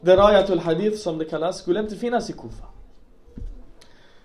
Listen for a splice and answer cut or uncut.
uncut